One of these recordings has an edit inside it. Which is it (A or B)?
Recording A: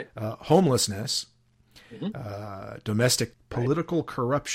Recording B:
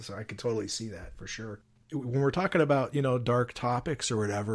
A